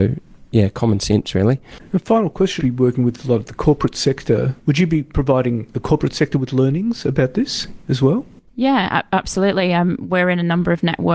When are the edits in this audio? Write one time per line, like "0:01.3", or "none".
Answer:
0:02.6